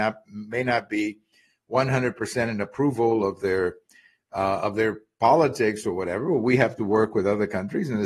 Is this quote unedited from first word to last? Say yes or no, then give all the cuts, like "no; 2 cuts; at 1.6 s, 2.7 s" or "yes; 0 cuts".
yes; 0 cuts